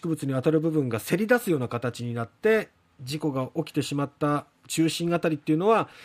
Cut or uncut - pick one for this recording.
uncut